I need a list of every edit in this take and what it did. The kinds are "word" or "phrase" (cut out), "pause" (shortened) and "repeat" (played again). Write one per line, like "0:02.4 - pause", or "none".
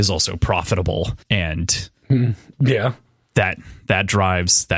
none